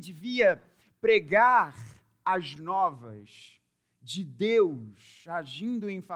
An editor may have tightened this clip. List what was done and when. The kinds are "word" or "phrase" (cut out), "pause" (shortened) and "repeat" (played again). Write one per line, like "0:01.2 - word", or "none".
0:02.6 - word